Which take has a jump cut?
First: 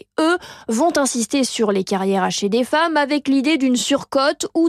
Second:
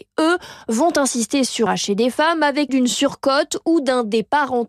second; 2 cuts; at 1.7 s, 2.7 s

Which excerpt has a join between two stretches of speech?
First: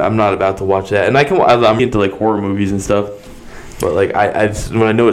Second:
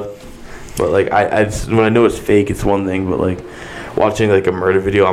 first; 1 cut; at 1.8 s

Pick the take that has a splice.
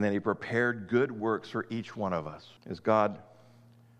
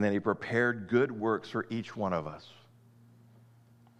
first; 1 cut; at 2.6 s

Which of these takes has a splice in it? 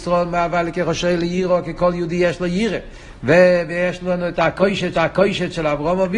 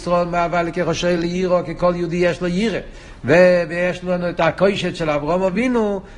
first; 1 cut; at 4.9 s

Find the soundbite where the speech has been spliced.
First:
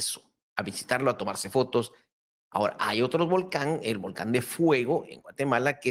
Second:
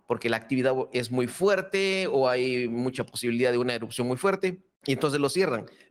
second; 1 cut; at 4.8 s

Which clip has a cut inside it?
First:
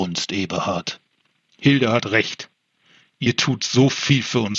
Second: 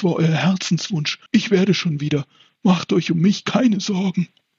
second; 1 cut; at 1.3 s

